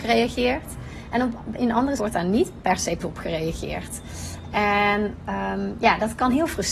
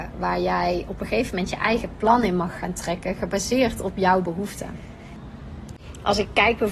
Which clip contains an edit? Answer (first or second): first